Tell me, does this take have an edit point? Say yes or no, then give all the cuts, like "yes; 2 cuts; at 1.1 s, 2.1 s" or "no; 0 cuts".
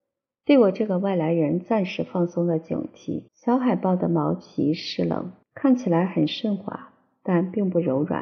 yes; 2 cuts; at 3.3 s, 5.4 s